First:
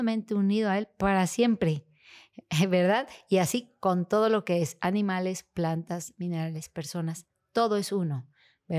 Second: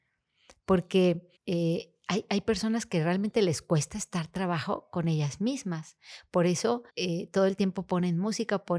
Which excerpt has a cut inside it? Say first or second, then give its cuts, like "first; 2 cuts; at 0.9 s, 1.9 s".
second; 2 cuts; at 1.4 s, 6.9 s